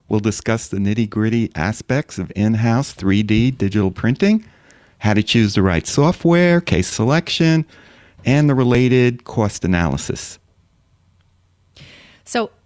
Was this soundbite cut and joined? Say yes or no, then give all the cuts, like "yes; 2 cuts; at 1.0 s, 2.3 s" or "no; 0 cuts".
no; 0 cuts